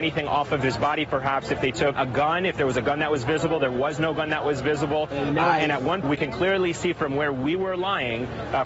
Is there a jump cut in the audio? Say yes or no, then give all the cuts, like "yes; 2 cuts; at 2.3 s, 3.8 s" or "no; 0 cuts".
yes; 2 cuts; at 1.9 s, 6.0 s